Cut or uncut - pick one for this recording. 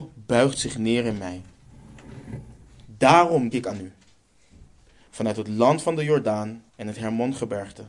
cut